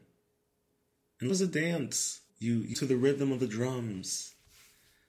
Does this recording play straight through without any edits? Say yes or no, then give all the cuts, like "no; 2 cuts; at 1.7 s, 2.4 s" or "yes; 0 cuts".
no; 3 cuts; at 1.3 s, 2.3 s, 2.7 s